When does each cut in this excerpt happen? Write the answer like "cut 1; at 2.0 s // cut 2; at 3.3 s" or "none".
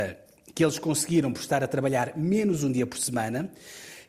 none